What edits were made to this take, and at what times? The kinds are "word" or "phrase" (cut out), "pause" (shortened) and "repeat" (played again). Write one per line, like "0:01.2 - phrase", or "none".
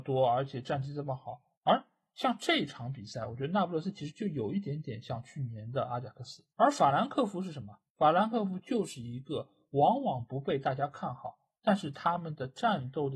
0:01.5 - pause
0:06.5 - pause
0:07.9 - pause